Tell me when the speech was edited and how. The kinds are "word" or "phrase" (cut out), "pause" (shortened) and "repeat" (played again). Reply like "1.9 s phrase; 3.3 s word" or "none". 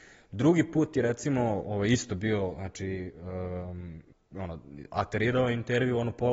4.1 s pause